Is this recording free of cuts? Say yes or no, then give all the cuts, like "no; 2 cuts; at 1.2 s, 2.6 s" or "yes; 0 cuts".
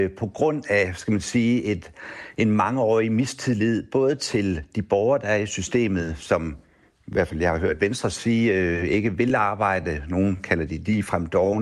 yes; 0 cuts